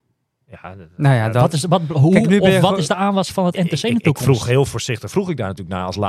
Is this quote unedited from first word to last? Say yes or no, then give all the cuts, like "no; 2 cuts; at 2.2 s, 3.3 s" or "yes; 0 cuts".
yes; 0 cuts